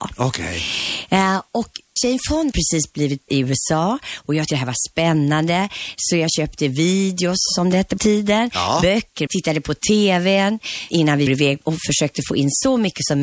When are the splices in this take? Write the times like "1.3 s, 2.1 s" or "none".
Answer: 2.0 s, 2.5 s, 3.3 s, 4.5 s, 8.0 s, 9.3 s, 10.9 s, 11.3 s, 11.6 s